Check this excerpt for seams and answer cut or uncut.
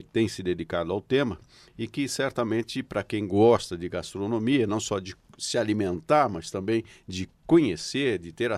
uncut